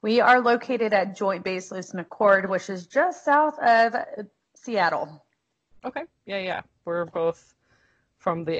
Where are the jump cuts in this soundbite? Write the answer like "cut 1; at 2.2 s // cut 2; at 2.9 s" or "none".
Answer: none